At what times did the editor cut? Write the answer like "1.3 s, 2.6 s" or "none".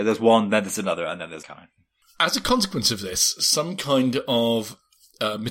1.4 s